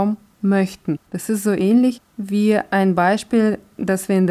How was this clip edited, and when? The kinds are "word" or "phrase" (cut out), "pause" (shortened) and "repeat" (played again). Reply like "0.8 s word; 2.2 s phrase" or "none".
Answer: 1.1 s pause